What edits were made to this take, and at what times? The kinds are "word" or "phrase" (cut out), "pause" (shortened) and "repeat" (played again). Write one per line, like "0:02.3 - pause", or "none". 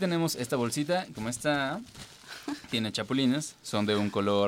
0:01.1 - phrase